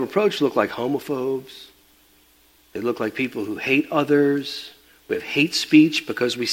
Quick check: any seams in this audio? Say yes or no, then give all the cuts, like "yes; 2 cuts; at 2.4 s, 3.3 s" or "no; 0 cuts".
no; 0 cuts